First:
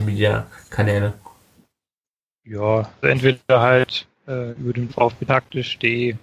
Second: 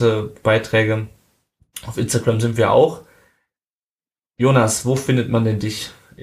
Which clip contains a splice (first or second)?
first